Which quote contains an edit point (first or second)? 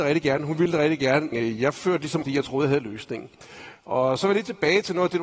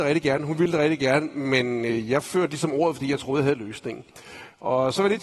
first